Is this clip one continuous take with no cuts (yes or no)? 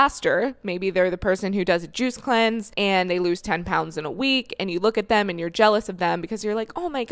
no